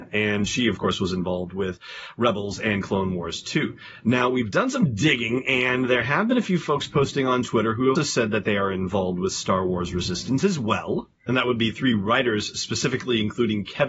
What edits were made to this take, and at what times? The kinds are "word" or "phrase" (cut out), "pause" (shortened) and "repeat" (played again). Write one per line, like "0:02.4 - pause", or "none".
0:08.0 - word